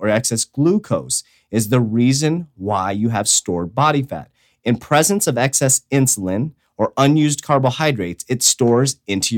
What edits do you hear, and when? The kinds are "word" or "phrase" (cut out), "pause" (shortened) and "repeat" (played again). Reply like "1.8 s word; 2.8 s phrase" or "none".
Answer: none